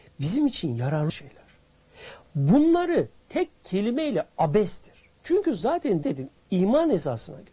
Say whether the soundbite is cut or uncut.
cut